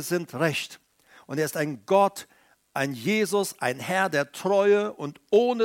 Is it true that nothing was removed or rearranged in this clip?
yes; 0 cuts

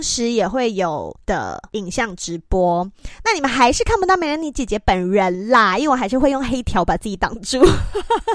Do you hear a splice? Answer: yes; 1 cut; at 1.2 s

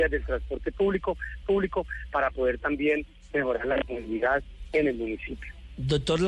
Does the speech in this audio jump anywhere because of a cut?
yes; 1 cut; at 1.4 s

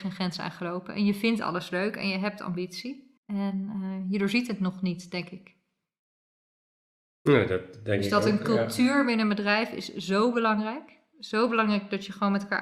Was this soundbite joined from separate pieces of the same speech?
yes; 1 cut; at 3.2 s

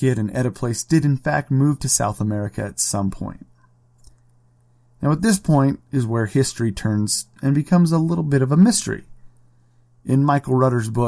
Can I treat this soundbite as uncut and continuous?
yes; 0 cuts

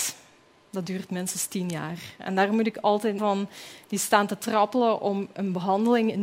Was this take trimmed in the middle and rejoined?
yes; 1 cut; at 3.2 s

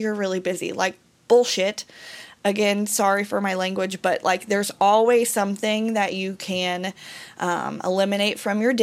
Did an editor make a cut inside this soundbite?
no; 0 cuts

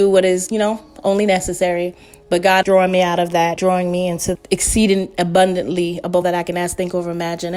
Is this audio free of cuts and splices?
no; 4 cuts; at 2.6 s, 3.6 s, 4.3 s, 6.2 s

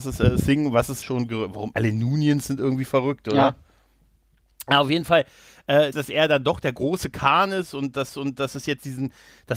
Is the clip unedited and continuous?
no; 4 cuts; at 1.0 s, 1.7 s, 5.9 s, 8.1 s

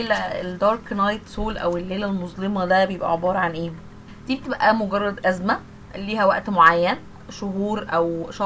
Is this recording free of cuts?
yes; 0 cuts

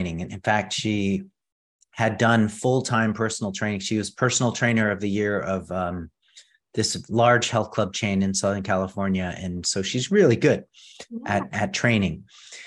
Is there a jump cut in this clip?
no; 0 cuts

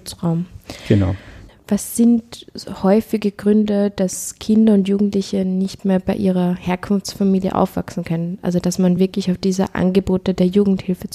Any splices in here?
no; 0 cuts

